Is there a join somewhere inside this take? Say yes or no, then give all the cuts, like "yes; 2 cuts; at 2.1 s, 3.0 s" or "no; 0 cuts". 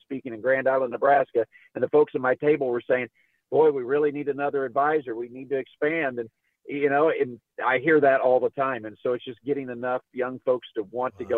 no; 0 cuts